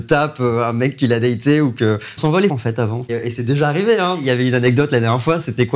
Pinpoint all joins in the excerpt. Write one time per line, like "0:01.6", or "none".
0:02.2
0:02.5
0:03.1